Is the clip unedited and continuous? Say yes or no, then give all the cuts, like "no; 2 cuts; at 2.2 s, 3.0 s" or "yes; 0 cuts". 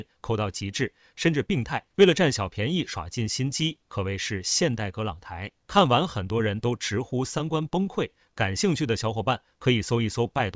no; 2 cuts; at 1.9 s, 5.6 s